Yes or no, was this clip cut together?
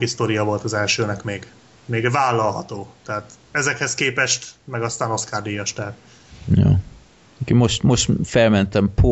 no